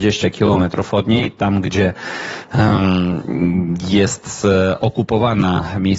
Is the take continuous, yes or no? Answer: yes